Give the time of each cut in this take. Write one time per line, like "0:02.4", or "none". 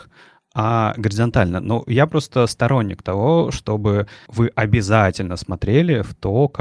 none